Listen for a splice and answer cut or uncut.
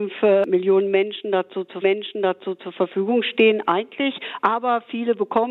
cut